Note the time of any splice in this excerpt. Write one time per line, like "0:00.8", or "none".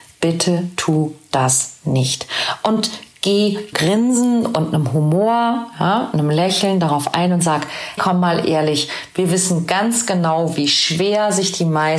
0:03.7
0:08.0